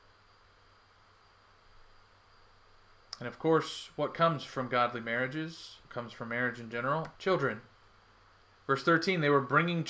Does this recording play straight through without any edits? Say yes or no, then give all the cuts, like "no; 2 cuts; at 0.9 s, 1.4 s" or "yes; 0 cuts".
no; 2 cuts; at 5.8 s, 7.2 s